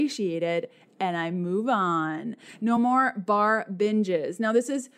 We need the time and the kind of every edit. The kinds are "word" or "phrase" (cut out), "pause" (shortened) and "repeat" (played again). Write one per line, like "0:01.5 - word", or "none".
none